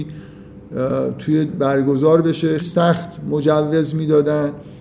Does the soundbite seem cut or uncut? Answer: cut